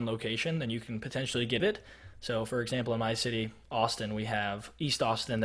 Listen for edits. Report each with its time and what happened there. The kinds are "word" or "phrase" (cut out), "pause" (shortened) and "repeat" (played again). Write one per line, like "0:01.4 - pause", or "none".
0:01.6 - phrase